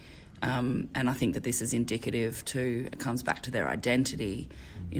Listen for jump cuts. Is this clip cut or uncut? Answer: uncut